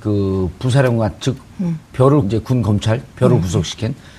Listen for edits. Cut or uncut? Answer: cut